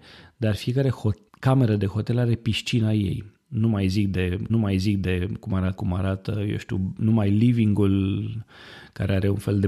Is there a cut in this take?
yes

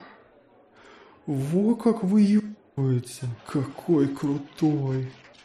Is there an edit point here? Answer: yes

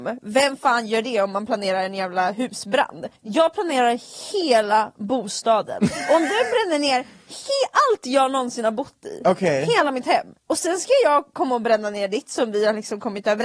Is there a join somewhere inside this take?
yes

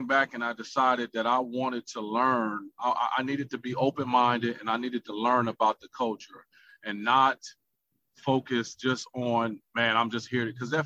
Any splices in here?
no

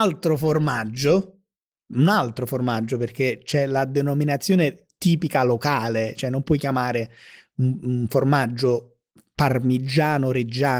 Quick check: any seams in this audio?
no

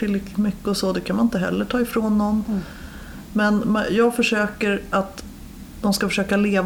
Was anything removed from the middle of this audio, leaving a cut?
no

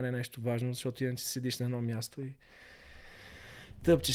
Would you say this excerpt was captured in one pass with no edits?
yes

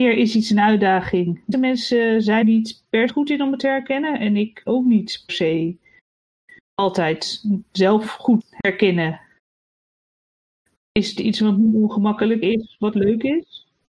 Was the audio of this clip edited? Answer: yes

